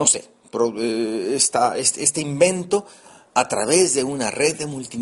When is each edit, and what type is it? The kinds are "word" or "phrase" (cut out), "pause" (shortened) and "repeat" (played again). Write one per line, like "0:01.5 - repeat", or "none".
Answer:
none